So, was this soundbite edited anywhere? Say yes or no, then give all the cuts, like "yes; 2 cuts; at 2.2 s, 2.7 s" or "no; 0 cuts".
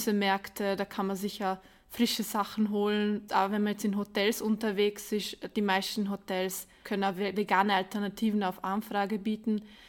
no; 0 cuts